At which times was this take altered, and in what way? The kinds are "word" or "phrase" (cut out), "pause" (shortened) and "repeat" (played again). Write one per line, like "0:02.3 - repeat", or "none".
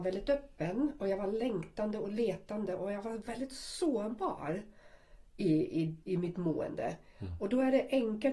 0:06.0 - pause